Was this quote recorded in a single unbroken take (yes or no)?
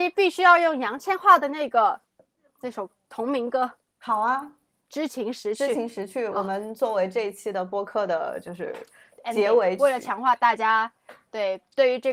yes